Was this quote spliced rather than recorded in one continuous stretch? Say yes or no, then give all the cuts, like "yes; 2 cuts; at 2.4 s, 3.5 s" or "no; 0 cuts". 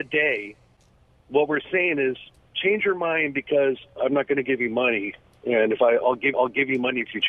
yes; 1 cut; at 6.3 s